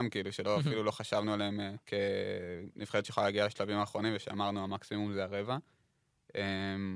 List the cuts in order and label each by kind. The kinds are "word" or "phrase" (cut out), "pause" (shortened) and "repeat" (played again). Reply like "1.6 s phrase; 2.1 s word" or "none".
1.8 s pause